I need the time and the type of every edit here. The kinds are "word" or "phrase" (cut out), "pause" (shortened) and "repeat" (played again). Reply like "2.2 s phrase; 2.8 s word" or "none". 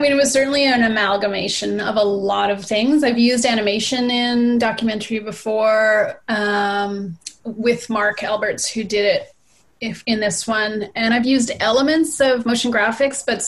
none